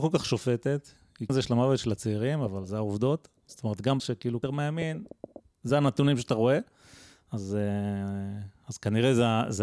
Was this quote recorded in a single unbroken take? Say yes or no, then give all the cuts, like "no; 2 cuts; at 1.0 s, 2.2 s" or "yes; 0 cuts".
no; 5 cuts; at 1.3 s, 3.4 s, 4.0 s, 4.4 s, 5.5 s